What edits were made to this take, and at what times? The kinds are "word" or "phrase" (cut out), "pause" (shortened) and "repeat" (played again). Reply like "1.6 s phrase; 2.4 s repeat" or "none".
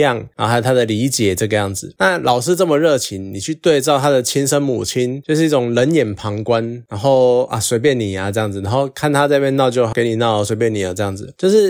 9.9 s word